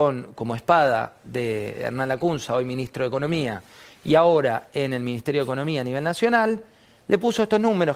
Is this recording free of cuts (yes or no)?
yes